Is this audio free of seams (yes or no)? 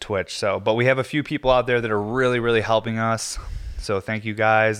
yes